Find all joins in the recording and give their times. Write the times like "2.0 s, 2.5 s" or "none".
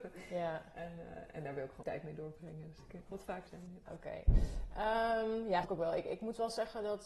1.8 s, 3.1 s, 3.5 s, 3.9 s, 5.6 s